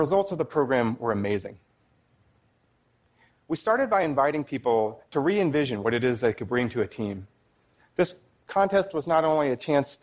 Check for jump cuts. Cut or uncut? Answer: uncut